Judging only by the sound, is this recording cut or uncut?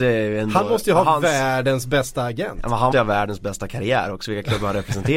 cut